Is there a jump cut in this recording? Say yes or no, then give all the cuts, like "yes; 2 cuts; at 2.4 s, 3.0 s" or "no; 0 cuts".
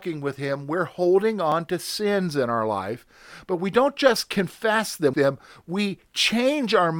yes; 1 cut; at 5.1 s